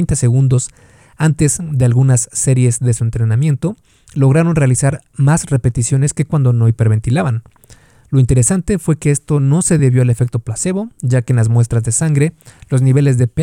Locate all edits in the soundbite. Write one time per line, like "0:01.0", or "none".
none

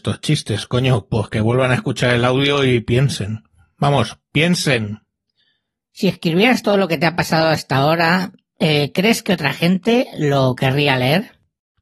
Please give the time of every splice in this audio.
none

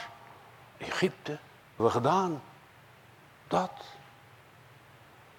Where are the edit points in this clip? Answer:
0:01.8

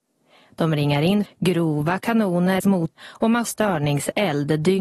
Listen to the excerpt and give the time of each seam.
0:01.2
0:02.6
0:03.0
0:03.5

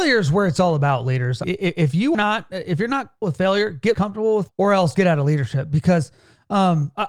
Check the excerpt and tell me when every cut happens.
0:01.4
0:02.1
0:03.2
0:03.9
0:04.5
0:04.9

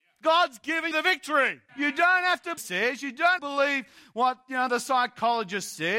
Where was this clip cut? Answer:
0:00.9
0:01.7
0:02.6
0:03.4

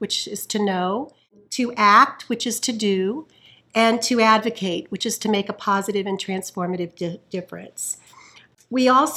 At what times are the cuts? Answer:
none

